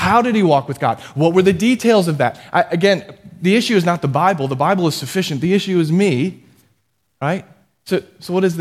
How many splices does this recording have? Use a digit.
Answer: 0